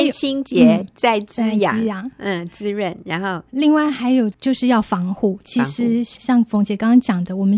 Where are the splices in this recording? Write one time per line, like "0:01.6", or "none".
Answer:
none